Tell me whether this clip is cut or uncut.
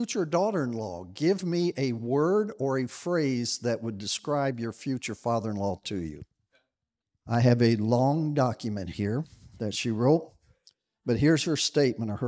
cut